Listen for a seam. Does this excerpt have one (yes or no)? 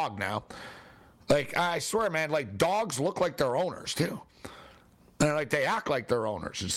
no